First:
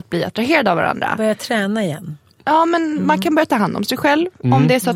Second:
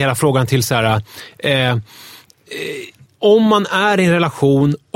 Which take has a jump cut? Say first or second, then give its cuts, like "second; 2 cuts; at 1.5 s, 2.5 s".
second; 1 cut; at 3.1 s